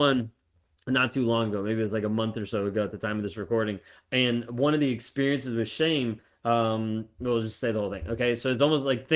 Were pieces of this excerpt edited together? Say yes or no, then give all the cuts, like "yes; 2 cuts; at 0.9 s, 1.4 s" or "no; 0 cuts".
no; 0 cuts